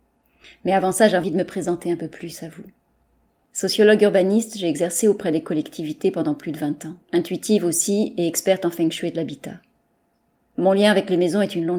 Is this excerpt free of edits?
no; 2 cuts; at 1.2 s, 7.0 s

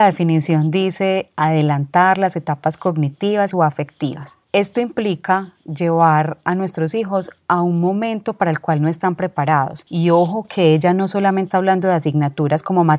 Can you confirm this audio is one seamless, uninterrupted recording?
no; 3 cuts; at 3.5 s, 4.4 s, 11.5 s

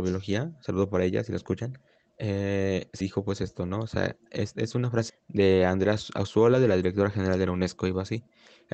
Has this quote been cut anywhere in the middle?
yes; 3 cuts; at 2.0 s, 3.0 s, 5.1 s

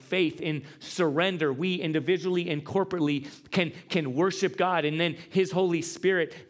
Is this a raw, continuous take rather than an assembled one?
yes; 0 cuts

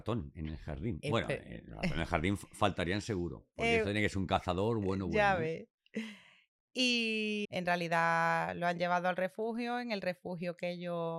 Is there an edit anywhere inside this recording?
yes; 1 cut; at 7.4 s

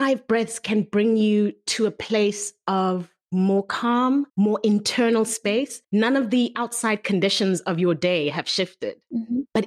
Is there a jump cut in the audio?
yes; 3 cuts; at 3.2 s, 4.3 s, 5.8 s

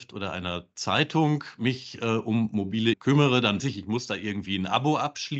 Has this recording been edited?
yes; 2 cuts; at 2.9 s, 3.6 s

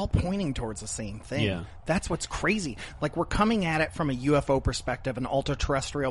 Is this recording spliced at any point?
no; 0 cuts

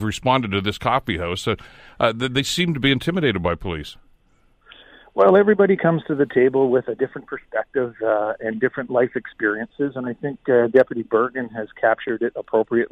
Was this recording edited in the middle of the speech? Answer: no; 0 cuts

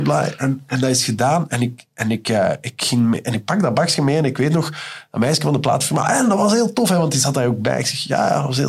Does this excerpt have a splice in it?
no; 0 cuts

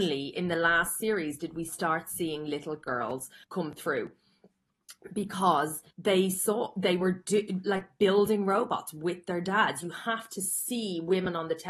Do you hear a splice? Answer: yes; 2 cuts; at 3.4 s, 5.9 s

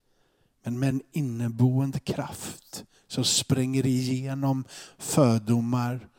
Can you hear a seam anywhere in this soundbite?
no; 0 cuts

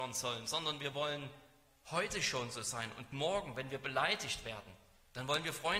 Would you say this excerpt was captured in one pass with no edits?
yes; 0 cuts

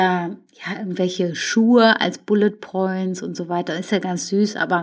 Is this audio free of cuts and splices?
yes; 0 cuts

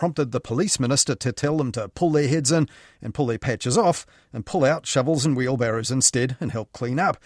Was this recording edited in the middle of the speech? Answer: no; 0 cuts

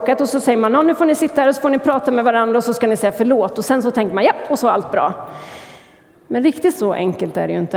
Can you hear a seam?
no; 0 cuts

